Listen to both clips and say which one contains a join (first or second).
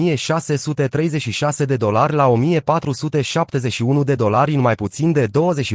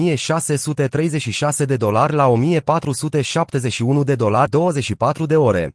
second